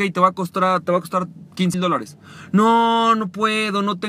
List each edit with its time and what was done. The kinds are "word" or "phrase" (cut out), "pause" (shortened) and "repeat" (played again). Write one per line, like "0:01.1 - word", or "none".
0:01.7 - word